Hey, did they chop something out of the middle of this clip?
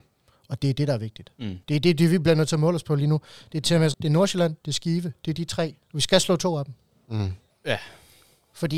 yes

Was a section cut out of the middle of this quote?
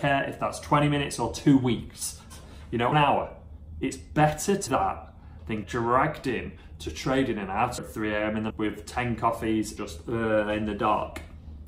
yes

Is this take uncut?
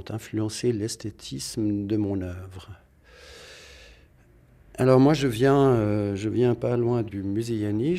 yes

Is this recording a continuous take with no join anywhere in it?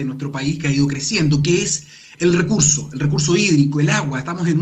yes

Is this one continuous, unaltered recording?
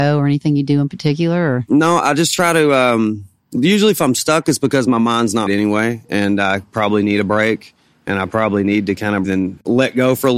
no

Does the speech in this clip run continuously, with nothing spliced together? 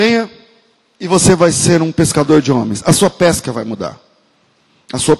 yes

